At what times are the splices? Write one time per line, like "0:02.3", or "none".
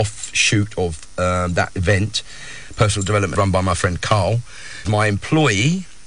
0:03.4
0:04.9